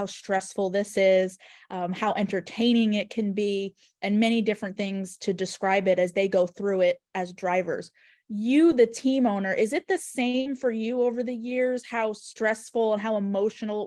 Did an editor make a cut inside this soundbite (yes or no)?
no